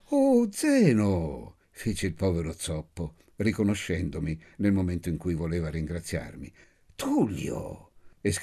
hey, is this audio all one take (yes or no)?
yes